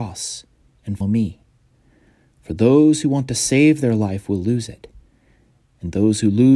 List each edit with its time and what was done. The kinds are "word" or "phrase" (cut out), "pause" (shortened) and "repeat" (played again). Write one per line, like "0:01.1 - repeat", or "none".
0:01.0 - word

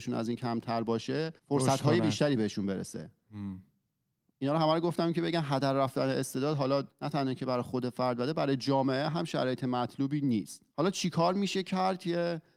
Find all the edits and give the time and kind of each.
0:01.4 - pause
0:06.9 - pause
0:10.7 - pause

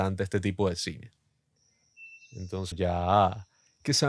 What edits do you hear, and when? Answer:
0:02.7 - word

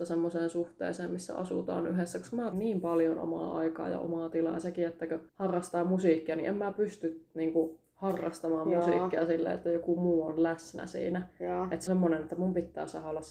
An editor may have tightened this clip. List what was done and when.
0:02.5 - word
0:05.3 - pause
0:11.9 - word

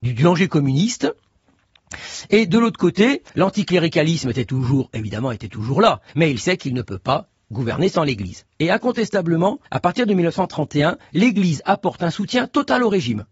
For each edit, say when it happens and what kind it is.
0:03.3 - pause
0:06.1 - pause
0:08.5 - pause
0:09.7 - pause

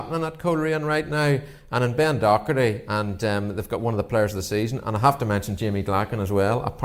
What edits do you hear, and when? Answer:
none

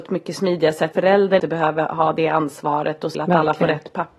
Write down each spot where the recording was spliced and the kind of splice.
0:00.9 - phrase
0:01.4 - word
0:03.1 - phrase

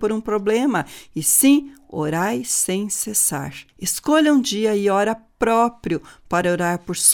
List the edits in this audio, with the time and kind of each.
0:03.7 - pause

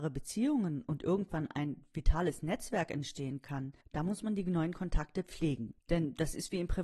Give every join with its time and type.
0:05.8 - pause

